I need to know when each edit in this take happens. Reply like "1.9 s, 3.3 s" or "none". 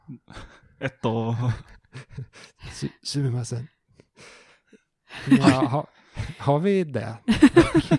none